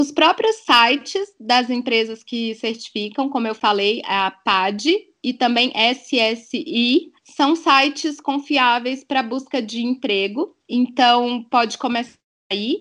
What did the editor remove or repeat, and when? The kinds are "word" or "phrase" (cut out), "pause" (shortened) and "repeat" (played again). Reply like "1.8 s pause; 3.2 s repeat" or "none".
7.2 s pause; 10.6 s pause